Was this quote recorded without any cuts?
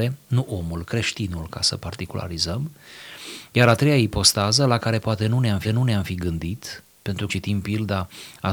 no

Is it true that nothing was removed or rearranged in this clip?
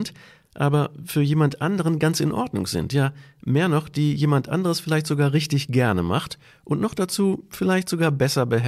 yes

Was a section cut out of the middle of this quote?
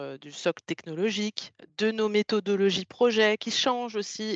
no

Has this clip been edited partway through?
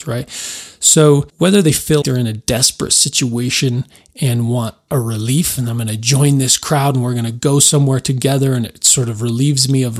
yes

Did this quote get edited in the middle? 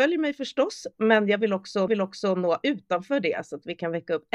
yes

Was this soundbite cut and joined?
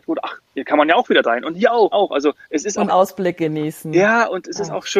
yes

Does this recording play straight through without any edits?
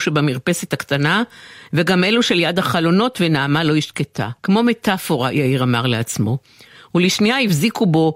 no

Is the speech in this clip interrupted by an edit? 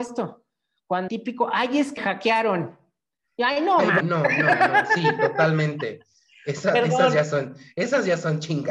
yes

